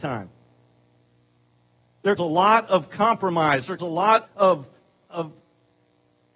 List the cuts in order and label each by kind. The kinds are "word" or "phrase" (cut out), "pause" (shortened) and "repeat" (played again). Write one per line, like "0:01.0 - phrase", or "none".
0:02.2 - word
0:03.8 - word
0:04.3 - word

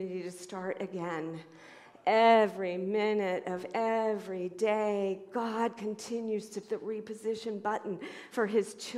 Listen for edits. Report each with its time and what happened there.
0:06.6 - word

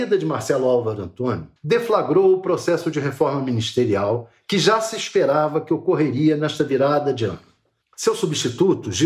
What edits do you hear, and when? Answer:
0:01.6 - pause
0:07.8 - pause

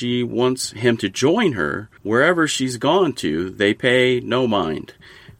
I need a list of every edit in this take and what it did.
0:02.0 - pause

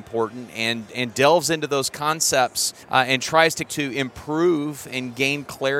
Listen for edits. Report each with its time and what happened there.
0:02.8 - pause
0:03.6 - word

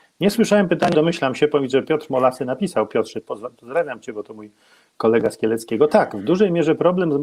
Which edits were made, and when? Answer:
0:00.9 - word

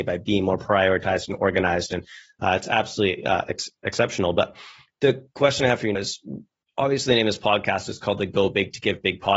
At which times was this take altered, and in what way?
0:05.9 - word

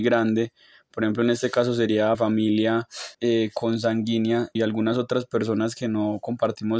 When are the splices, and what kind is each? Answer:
0:02.1 - word
0:03.1 - pause
0:04.6 - phrase

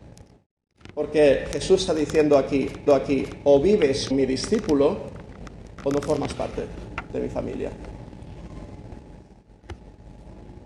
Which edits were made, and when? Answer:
0:01.9 - word
0:02.9 - repeat
0:04.1 - word

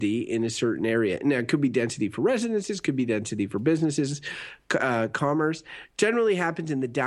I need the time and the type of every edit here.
none

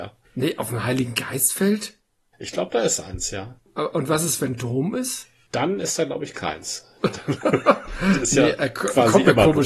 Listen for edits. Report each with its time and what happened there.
none

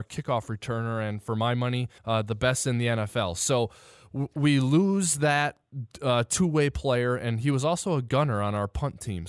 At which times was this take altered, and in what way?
0:02.0 - pause

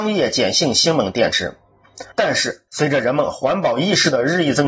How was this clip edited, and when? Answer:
0:02.1 - pause
0:02.7 - pause

